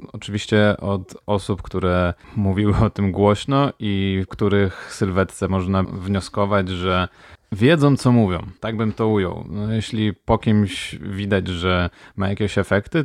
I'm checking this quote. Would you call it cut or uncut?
cut